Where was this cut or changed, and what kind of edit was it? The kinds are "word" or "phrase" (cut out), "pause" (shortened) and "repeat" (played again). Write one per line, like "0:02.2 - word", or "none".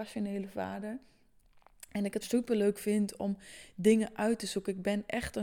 0:02.2 - word